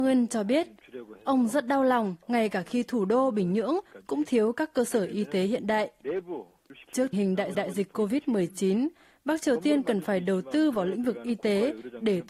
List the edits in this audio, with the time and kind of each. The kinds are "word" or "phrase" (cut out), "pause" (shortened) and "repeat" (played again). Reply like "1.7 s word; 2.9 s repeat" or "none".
2.2 s pause; 7.1 s word; 7.5 s repeat